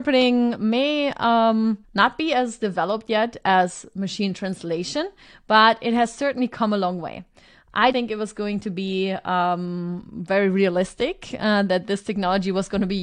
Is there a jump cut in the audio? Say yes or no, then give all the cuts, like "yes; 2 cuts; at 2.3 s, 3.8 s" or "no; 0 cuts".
yes; 2 cuts; at 1.8 s, 7.9 s